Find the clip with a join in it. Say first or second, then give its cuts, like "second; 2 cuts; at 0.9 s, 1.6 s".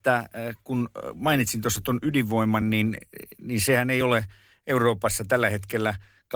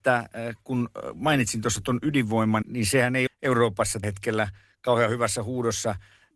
second; 3 cuts; at 2.6 s, 3.3 s, 4.0 s